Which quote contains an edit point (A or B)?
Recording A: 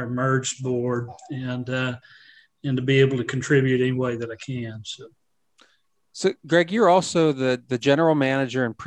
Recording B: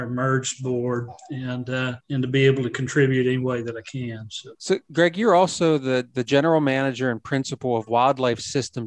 B